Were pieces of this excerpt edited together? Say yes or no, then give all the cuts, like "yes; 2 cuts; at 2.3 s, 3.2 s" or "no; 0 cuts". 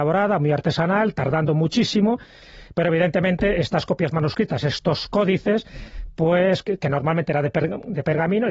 no; 0 cuts